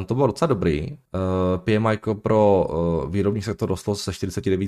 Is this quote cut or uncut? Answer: cut